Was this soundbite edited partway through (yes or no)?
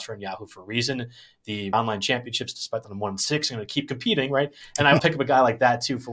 yes